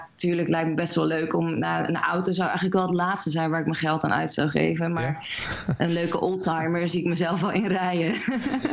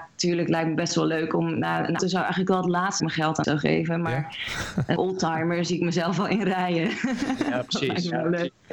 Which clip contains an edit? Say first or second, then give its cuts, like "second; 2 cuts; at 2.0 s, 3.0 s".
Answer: second; 4 cuts; at 2.0 s, 3.0 s, 3.4 s, 5.0 s